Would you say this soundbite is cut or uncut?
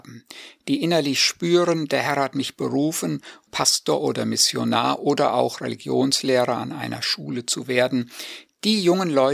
cut